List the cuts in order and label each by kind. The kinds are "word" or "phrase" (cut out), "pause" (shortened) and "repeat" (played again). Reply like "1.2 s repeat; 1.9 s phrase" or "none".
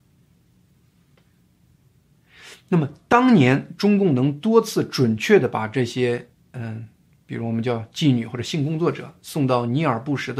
none